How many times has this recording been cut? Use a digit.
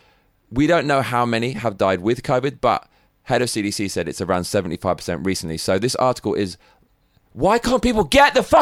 0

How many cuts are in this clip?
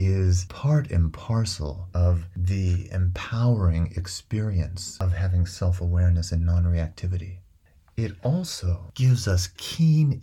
0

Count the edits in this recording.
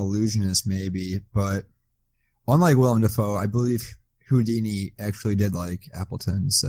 0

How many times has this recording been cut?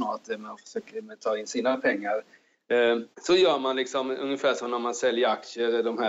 1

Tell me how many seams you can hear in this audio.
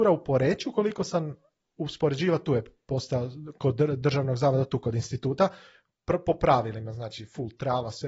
0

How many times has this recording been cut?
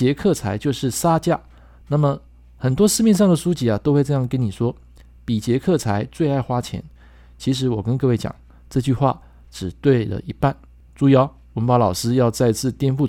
0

